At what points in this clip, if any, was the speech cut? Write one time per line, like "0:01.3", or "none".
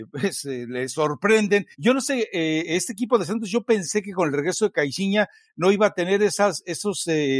0:01.7